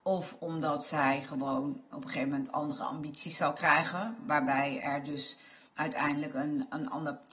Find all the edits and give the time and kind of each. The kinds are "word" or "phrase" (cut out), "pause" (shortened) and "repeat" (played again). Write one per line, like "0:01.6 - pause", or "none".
0:05.7 - pause